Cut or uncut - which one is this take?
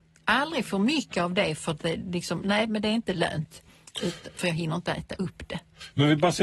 uncut